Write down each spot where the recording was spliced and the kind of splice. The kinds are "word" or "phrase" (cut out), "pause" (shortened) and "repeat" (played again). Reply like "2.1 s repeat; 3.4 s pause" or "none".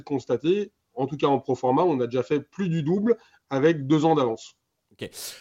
none